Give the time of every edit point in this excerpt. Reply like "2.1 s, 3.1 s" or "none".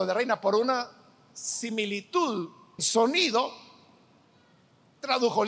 2.8 s